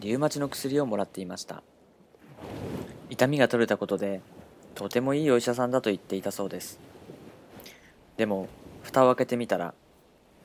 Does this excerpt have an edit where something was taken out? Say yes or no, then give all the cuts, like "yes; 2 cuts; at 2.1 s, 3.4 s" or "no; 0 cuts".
no; 0 cuts